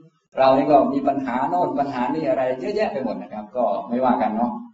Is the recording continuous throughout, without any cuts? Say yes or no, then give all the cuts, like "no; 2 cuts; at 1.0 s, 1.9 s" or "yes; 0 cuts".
yes; 0 cuts